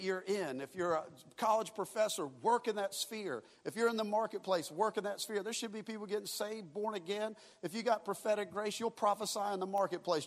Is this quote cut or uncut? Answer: uncut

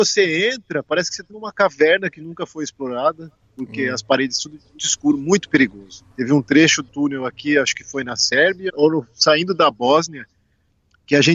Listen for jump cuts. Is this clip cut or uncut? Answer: cut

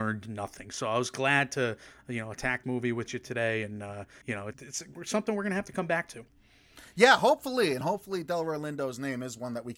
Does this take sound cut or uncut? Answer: cut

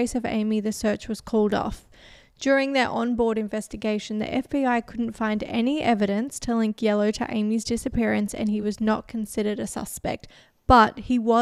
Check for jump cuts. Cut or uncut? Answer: uncut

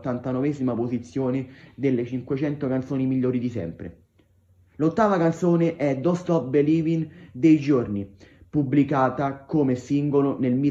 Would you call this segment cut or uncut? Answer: uncut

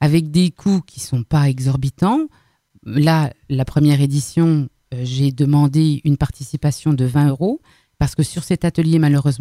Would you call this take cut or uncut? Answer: uncut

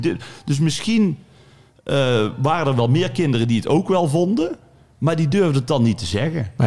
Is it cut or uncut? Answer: uncut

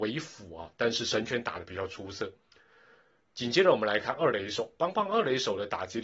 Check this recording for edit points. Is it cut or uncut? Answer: uncut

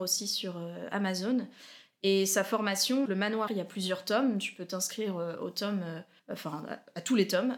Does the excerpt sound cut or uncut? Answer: cut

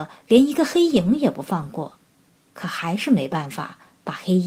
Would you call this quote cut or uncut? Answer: uncut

